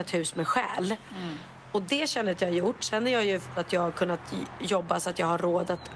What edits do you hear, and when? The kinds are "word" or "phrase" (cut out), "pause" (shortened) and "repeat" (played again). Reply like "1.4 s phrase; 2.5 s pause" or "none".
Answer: 3.6 s word